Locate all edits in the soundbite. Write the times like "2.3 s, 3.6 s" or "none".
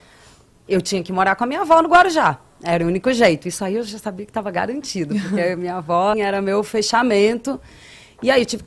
6.1 s